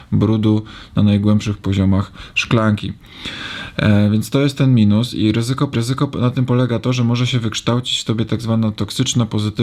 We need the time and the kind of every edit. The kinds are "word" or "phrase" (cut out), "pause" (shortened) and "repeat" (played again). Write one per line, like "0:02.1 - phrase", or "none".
0:05.7 - repeat